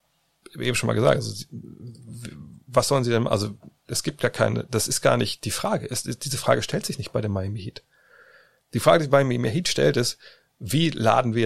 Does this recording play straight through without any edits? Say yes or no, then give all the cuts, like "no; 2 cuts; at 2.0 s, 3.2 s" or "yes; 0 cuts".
yes; 0 cuts